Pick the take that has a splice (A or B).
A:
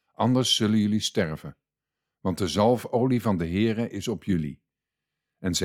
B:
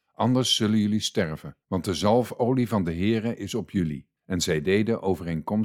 B